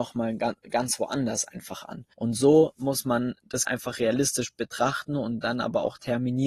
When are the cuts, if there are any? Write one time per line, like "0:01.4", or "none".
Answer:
0:02.1
0:03.6